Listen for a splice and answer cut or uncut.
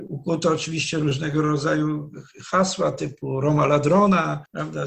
uncut